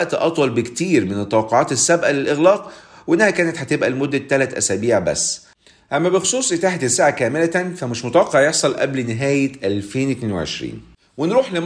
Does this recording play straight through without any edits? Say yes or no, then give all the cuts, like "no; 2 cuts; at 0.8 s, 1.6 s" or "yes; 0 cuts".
yes; 0 cuts